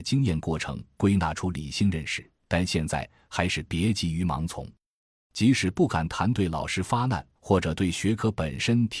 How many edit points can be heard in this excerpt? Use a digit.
2